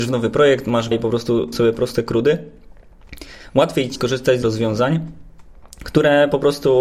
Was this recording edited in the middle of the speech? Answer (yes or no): yes